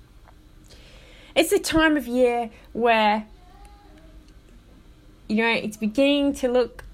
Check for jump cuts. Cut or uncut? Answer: uncut